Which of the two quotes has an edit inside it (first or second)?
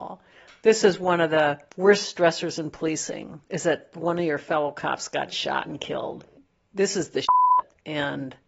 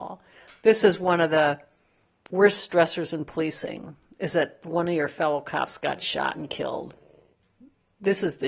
first